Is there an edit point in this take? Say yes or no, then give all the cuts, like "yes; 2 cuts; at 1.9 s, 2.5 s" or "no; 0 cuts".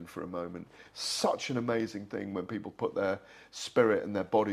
no; 0 cuts